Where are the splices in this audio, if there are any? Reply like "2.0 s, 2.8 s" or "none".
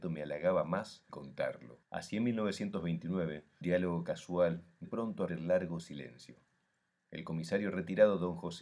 1.1 s, 1.8 s, 3.6 s, 4.8 s, 5.3 s